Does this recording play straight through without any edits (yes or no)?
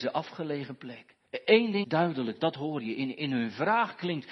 no